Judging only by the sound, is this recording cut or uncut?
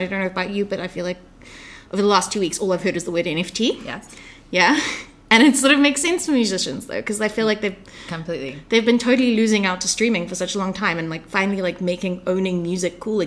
uncut